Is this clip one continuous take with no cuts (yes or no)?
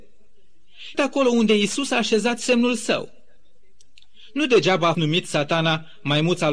no